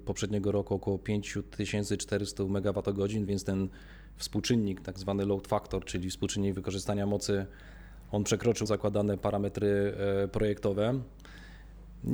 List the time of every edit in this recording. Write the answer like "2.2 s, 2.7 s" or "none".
8.7 s